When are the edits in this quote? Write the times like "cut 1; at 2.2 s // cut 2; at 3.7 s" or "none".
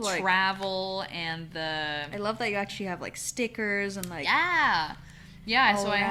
none